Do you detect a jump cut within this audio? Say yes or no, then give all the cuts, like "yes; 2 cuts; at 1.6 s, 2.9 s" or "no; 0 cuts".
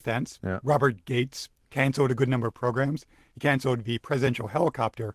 no; 0 cuts